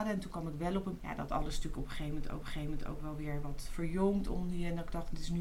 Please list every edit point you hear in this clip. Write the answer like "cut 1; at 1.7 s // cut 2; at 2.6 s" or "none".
cut 1; at 1.0 s // cut 2; at 2.4 s